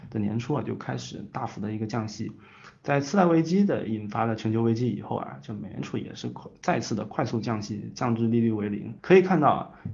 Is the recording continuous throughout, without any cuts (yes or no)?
no